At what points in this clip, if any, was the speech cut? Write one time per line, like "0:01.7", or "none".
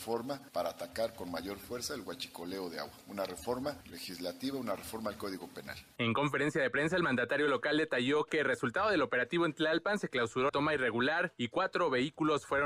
0:10.5